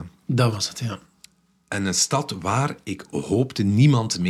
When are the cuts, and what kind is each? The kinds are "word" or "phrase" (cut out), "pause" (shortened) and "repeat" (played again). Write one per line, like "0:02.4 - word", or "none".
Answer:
none